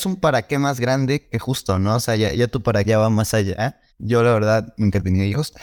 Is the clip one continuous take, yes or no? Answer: no